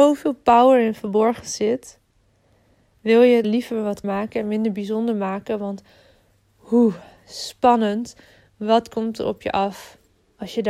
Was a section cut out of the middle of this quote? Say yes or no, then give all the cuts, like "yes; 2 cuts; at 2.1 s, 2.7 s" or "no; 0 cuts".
yes; 2 cuts; at 3.4 s, 4.0 s